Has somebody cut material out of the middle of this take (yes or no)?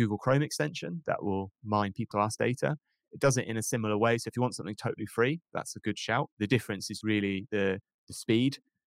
yes